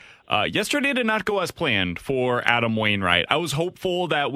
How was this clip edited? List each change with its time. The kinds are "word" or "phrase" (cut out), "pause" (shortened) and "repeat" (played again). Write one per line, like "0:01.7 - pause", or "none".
none